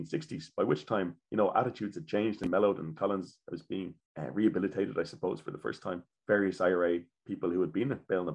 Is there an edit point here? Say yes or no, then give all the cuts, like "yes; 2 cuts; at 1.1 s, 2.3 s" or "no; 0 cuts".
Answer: yes; 1 cut; at 1.2 s